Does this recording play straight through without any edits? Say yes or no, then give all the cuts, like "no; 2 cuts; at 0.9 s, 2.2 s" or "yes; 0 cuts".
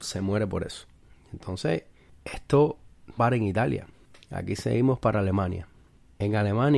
no; 1 cut; at 3.2 s